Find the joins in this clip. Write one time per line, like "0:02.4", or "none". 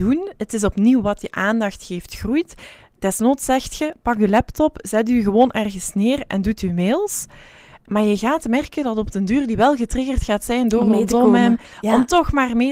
none